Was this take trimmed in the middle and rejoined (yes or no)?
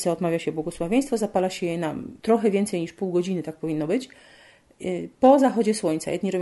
yes